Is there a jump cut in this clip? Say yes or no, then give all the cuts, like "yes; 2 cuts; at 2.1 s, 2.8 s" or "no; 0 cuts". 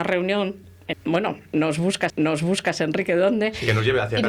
yes; 2 cuts; at 0.9 s, 2.1 s